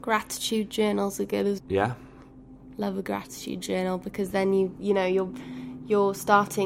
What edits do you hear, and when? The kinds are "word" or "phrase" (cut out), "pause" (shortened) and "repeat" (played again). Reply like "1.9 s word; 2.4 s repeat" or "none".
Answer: 1.6 s word